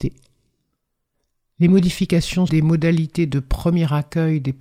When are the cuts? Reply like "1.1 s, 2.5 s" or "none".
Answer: 2.5 s